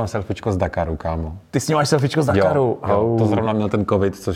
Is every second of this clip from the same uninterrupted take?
yes; 0 cuts

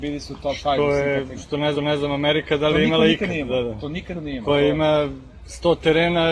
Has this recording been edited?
yes; 3 cuts; at 1.4 s, 1.7 s, 4.1 s

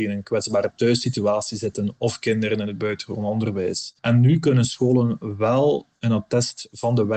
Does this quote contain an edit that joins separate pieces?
yes; 1 cut; at 4.0 s

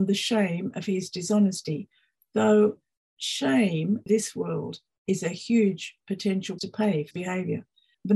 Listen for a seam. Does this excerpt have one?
yes; 3 cuts; at 4.1 s, 6.6 s, 7.1 s

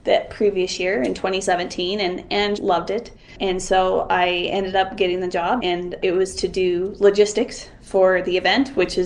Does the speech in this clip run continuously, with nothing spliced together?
no; 1 cut; at 2.6 s

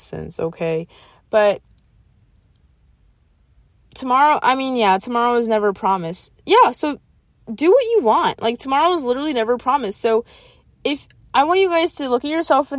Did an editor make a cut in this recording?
no; 0 cuts

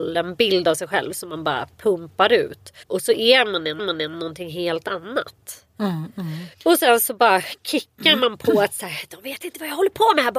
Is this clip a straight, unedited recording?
no; 3 cuts; at 2.8 s, 3.8 s, 6.5 s

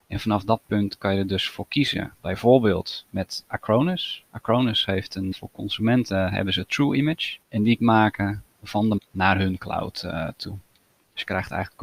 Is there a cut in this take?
yes; 4 cuts; at 5.3 s, 7.4 s, 7.8 s, 9.0 s

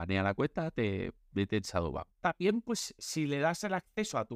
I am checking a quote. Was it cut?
yes; 1 cut; at 2.1 s

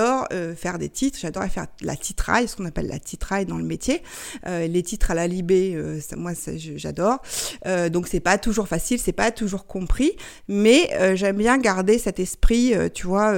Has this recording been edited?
no; 0 cuts

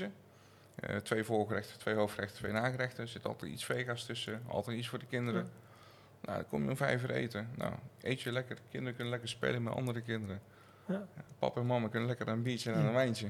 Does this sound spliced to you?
no; 0 cuts

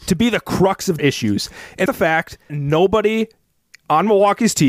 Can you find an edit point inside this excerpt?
yes; 3 cuts; at 1.0 s, 1.9 s, 2.5 s

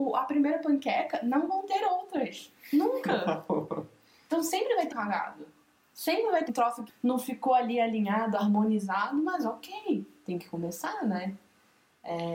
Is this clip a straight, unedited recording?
no; 3 cuts; at 4.9 s, 6.5 s, 6.9 s

